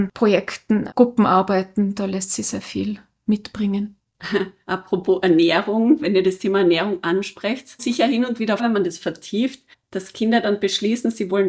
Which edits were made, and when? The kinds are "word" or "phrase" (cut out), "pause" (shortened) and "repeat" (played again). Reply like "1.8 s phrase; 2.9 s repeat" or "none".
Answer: 0.9 s word; 2.4 s word; 7.8 s word; 8.6 s word; 9.7 s pause